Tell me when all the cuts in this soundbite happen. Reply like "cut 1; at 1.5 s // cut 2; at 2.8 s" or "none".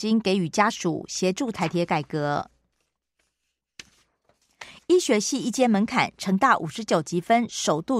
none